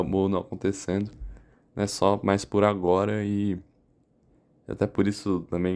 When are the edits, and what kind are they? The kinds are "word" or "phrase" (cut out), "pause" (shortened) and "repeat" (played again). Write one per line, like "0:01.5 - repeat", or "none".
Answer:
none